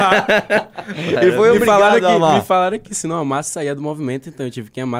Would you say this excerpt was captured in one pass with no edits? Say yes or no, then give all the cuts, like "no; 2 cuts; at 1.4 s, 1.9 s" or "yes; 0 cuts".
yes; 0 cuts